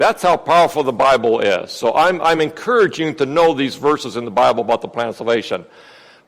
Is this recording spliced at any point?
no; 0 cuts

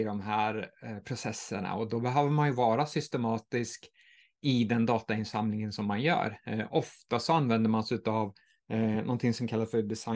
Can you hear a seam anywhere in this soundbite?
no; 0 cuts

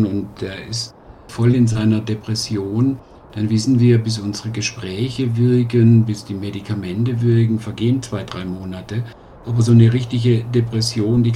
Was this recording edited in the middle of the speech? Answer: no; 0 cuts

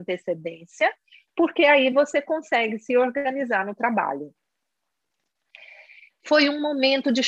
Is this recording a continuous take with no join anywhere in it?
yes; 0 cuts

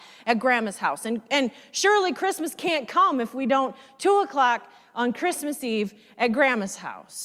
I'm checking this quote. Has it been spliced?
no; 0 cuts

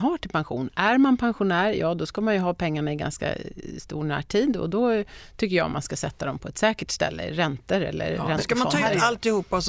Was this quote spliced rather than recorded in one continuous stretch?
no; 0 cuts

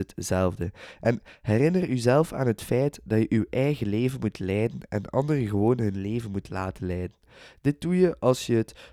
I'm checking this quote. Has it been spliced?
no; 0 cuts

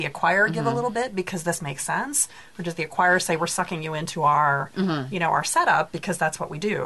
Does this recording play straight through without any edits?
yes; 0 cuts

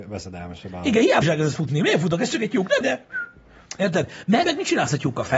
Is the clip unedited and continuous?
no; 3 cuts; at 1.2 s, 2.8 s, 4.4 s

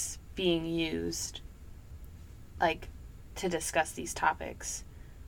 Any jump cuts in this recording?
no; 0 cuts

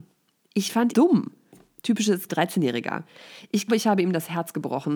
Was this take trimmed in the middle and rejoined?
yes; 3 cuts; at 0.9 s, 2.3 s, 3.7 s

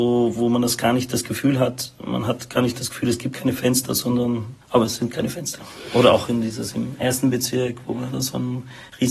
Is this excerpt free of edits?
no; 1 cut; at 4.6 s

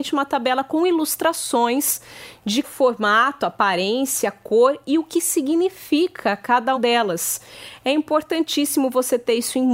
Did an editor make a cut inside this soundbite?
yes; 2 cuts; at 2.6 s, 6.8 s

